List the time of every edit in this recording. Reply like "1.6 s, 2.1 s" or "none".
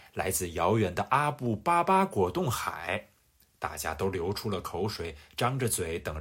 none

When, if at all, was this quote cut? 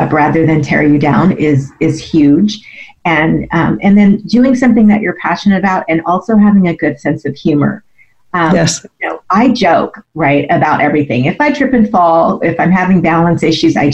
none

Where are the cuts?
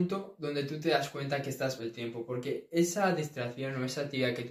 1.8 s

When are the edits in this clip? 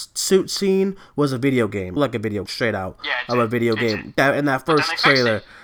2.0 s, 2.5 s

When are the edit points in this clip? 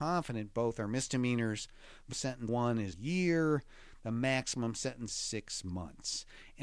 2.1 s, 2.5 s, 2.9 s, 5.1 s

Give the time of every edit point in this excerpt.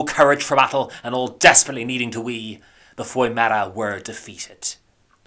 none

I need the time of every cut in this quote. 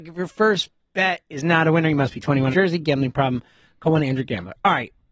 2.5 s

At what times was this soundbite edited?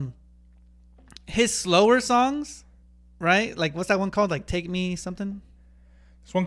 2.9 s

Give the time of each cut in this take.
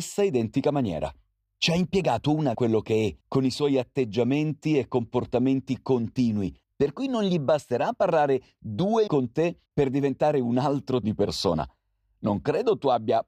2.5 s, 3.2 s, 6.6 s, 9.1 s, 9.7 s, 11.0 s

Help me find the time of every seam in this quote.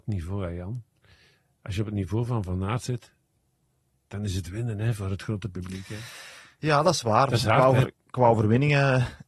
none

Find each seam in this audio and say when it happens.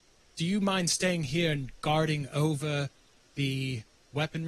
none

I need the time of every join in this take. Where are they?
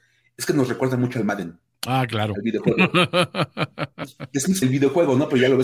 4.6 s

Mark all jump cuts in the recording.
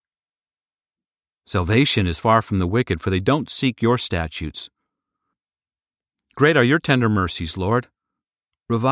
none

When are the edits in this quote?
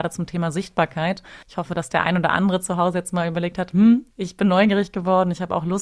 1.4 s, 4.1 s

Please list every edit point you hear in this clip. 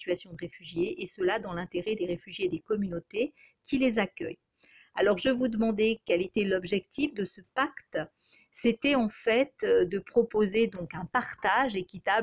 none

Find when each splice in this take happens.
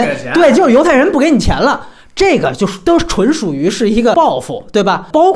none

